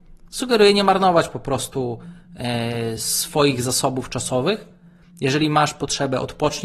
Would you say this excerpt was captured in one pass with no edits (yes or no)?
yes